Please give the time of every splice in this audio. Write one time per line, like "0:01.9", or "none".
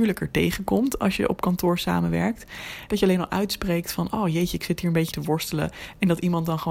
0:05.1